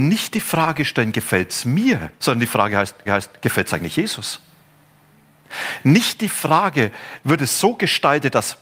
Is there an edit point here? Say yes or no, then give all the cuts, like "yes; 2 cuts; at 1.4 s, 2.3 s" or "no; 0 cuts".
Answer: yes; 2 cuts; at 2.2 s, 3.1 s